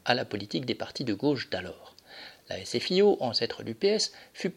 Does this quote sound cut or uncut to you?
uncut